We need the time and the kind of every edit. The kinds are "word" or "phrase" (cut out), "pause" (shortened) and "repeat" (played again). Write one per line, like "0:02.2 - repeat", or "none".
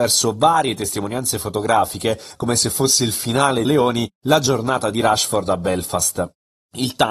0:03.6 - phrase